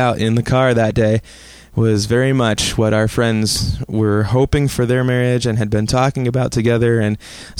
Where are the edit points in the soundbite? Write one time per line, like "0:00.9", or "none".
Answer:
none